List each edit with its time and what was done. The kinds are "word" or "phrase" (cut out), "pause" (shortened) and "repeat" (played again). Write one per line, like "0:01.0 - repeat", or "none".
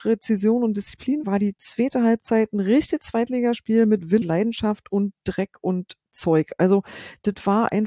0:01.2 - word
0:04.2 - word